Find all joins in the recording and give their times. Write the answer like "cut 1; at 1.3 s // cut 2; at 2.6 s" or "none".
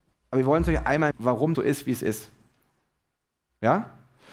cut 1; at 1.1 s // cut 2; at 1.5 s